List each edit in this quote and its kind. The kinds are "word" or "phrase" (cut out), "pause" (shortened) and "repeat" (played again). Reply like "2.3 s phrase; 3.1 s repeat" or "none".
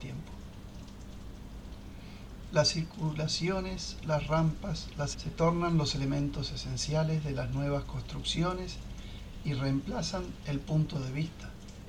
5.1 s word